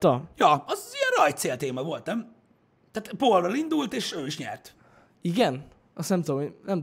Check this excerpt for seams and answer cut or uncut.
uncut